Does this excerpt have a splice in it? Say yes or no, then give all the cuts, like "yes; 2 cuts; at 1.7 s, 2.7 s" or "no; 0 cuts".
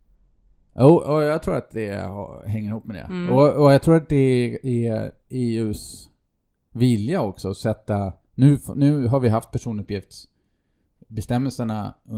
no; 0 cuts